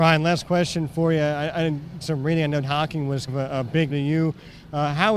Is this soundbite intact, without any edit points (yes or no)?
no